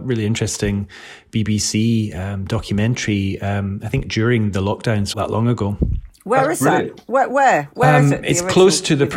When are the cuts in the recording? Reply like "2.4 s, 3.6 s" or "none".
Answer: 5.1 s